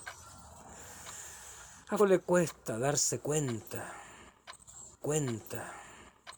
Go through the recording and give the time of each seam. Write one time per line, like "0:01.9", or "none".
0:02.0
0:05.0